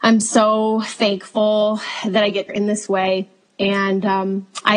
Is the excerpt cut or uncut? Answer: cut